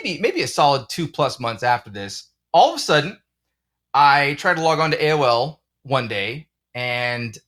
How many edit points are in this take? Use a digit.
0